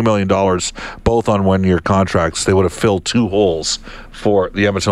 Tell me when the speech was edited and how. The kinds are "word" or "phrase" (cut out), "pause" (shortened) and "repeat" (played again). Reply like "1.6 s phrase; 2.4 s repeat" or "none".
none